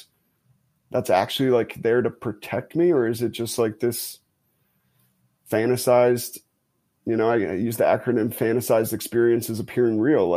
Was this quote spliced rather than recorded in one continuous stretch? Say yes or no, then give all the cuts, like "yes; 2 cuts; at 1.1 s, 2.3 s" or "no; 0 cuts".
no; 0 cuts